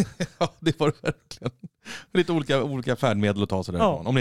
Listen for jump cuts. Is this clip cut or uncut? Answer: uncut